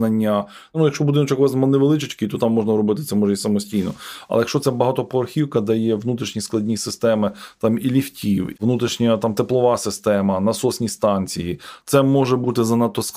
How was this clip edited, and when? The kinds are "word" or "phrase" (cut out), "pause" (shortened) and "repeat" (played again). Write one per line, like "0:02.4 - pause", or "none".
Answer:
0:08.6 - word
0:11.8 - pause

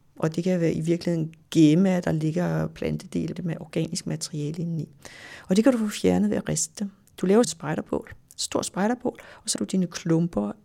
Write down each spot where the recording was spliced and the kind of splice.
0:03.4 - word
0:07.4 - word
0:09.6 - word

